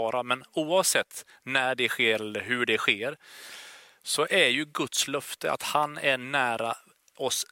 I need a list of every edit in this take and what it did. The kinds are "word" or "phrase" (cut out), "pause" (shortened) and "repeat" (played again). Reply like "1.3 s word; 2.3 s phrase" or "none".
none